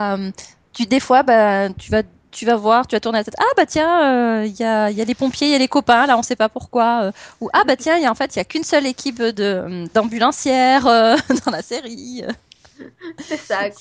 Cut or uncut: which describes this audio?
uncut